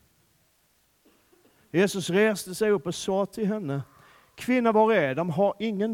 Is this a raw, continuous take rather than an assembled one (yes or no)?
yes